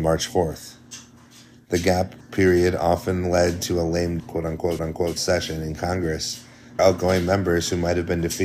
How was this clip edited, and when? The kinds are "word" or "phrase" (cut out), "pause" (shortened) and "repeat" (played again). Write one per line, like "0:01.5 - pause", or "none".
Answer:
0:02.2 - pause
0:04.2 - word
0:04.8 - repeat
0:06.8 - word